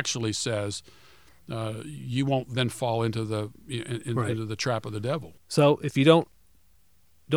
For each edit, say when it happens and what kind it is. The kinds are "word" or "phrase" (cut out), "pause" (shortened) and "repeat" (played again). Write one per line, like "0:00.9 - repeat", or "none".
none